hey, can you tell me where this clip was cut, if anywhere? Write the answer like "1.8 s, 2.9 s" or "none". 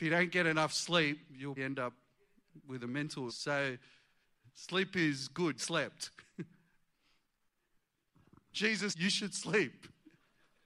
1.6 s, 3.3 s, 4.4 s, 5.6 s, 8.5 s, 8.9 s